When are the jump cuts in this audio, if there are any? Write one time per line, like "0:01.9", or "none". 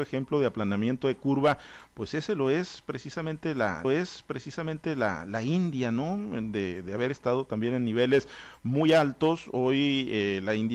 0:03.8